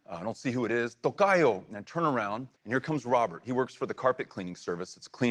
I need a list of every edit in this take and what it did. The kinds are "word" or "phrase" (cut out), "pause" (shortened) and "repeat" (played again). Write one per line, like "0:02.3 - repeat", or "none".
0:02.6 - pause